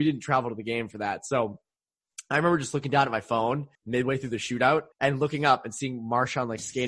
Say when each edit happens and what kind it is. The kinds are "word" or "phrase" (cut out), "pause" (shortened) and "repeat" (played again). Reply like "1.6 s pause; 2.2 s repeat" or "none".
3.7 s pause; 4.9 s pause